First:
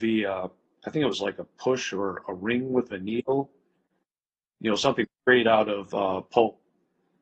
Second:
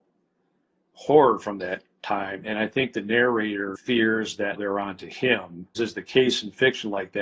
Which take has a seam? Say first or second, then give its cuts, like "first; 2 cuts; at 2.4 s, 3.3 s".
second; 3 cuts; at 0.9 s, 4.6 s, 5.7 s